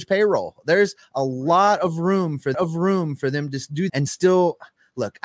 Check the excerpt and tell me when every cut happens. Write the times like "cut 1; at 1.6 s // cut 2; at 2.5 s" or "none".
cut 1; at 2.5 s // cut 2; at 3.9 s